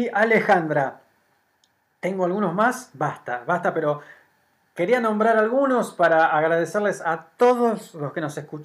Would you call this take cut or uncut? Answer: uncut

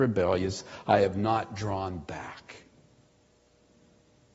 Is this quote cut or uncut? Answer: uncut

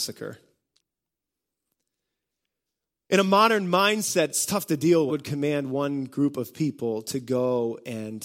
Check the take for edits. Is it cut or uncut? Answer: cut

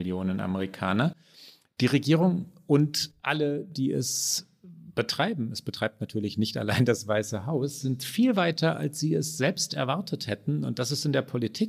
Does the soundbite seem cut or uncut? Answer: uncut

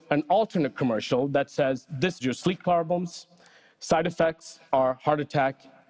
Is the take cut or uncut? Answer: cut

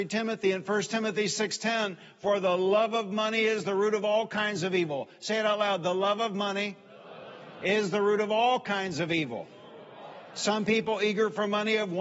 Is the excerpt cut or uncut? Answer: uncut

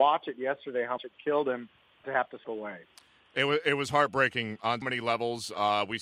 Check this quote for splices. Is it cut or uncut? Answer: cut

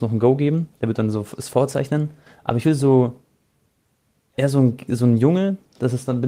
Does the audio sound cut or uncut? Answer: uncut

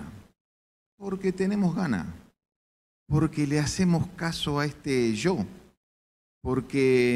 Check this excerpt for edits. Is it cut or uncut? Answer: uncut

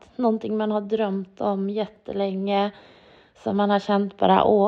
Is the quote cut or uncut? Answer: uncut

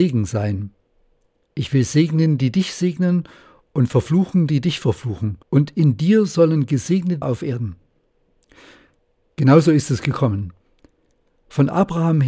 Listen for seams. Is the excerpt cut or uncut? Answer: cut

